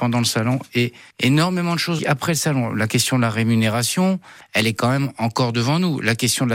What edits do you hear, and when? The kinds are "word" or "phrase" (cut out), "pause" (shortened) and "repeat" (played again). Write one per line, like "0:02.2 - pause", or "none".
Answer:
0:02.0 - word